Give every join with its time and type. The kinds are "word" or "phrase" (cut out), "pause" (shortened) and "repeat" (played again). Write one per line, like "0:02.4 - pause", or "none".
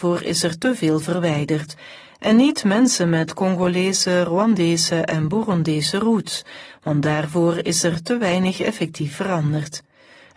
none